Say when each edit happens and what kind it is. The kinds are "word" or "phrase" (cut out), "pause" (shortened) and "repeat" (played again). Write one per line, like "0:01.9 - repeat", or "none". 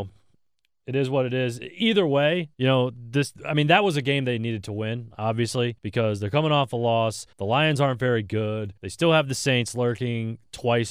0:02.5 - pause
0:05.8 - pause
0:07.3 - pause
0:08.8 - pause